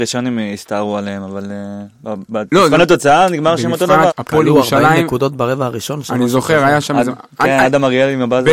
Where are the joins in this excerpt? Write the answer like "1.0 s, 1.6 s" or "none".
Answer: 4.1 s

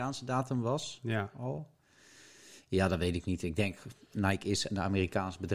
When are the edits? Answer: none

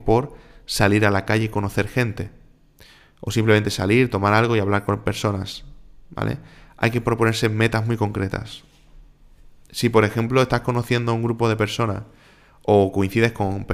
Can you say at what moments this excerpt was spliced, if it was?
none

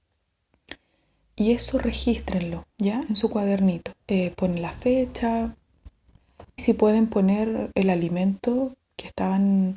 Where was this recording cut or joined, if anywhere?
2.7 s, 4.0 s, 6.6 s, 8.8 s

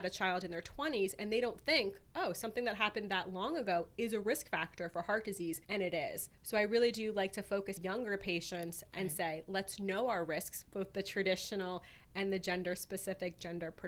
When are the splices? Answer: 5.6 s, 6.3 s, 7.8 s

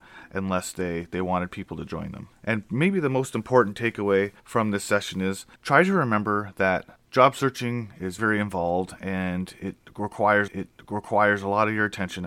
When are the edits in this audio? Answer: 2.3 s, 4.4 s, 5.5 s, 7.1 s, 8.2 s, 10.5 s

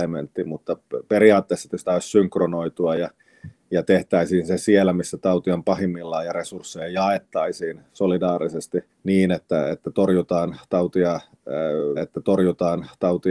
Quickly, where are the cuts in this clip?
1.8 s, 8.9 s, 12.0 s

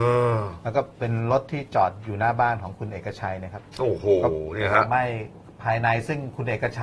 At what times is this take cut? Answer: 0.9 s

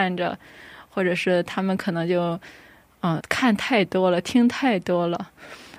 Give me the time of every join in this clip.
3.2 s

